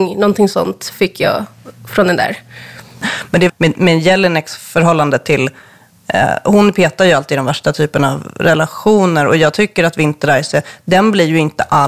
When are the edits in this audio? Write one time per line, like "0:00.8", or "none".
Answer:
0:03.5